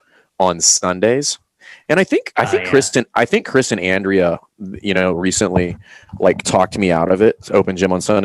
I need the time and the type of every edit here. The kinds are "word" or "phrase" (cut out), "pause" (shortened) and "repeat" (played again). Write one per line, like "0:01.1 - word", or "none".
none